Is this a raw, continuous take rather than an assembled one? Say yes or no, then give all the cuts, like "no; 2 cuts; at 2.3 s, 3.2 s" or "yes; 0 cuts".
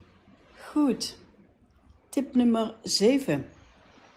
yes; 0 cuts